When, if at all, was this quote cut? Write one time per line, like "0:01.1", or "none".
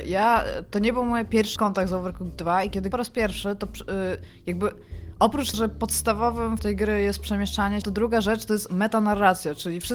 0:01.6
0:02.9
0:05.5
0:06.6
0:07.8